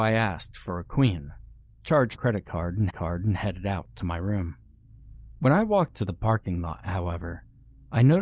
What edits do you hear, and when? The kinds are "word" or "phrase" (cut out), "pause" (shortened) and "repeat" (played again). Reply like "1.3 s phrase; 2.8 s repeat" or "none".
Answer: 2.1 s word; 2.9 s repeat; 5.9 s word